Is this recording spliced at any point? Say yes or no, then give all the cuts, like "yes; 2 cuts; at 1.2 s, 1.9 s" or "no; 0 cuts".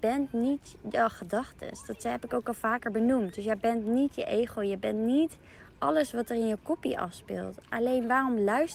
no; 0 cuts